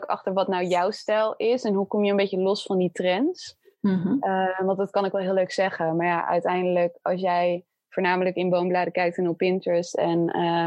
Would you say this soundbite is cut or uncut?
uncut